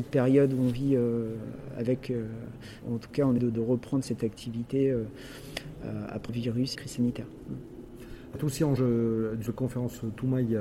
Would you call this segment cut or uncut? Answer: cut